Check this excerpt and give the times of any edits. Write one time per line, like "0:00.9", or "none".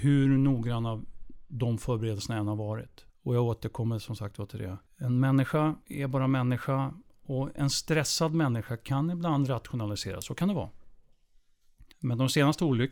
0:03.1
0:04.9
0:05.8
0:11.9